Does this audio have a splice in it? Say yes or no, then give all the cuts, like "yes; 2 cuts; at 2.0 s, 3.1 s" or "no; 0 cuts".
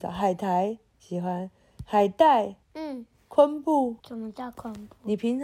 yes; 3 cuts; at 0.9 s, 2.6 s, 4.0 s